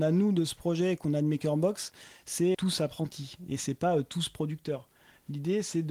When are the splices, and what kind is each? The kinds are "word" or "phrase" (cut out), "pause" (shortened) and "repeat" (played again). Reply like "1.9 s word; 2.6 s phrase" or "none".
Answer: 2.5 s word

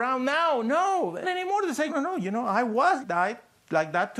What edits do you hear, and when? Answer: 1.2 s word; 1.9 s word; 3.0 s word

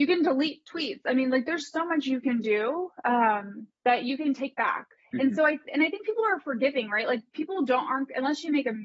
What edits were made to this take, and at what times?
3.7 s pause; 5.0 s pause

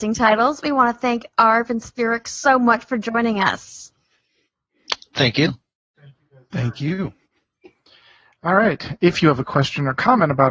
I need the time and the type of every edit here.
none

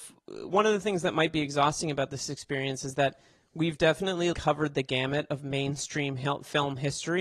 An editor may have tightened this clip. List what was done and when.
4.3 s word

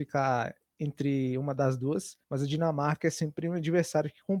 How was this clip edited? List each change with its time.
2.2 s pause

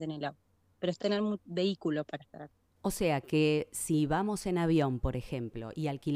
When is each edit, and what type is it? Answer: 1.0 s word

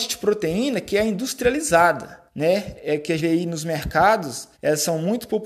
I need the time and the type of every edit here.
2.3 s pause; 3.2 s word; 4.5 s pause

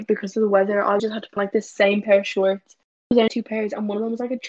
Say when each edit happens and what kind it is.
1.0 s word; 1.4 s word; 3.3 s word

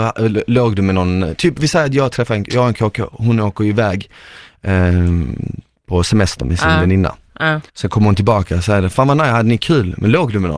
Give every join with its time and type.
7.7 s pause

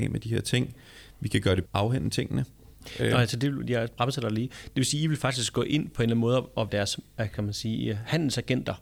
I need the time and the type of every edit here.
1.7 s phrase; 6.7 s word

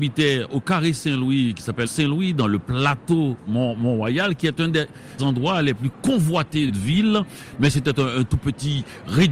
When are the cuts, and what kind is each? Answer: 1.8 s phrase; 5.2 s word; 6.7 s phrase

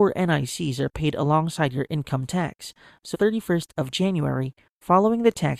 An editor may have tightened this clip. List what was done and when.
3.1 s phrase

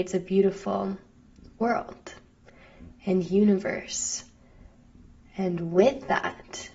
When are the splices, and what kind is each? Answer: none

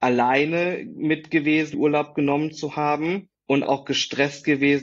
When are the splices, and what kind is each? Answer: 1.7 s phrase; 3.6 s word

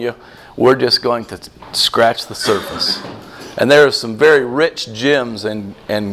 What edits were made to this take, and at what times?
none

